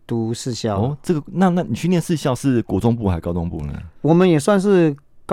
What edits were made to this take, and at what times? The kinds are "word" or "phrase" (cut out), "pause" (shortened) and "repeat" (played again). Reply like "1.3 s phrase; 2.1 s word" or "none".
4.0 s pause